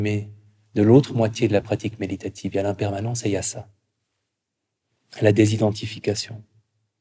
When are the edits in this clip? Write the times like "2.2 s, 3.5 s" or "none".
none